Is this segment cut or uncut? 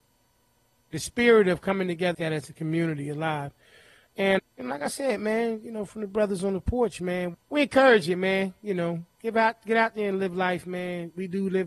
cut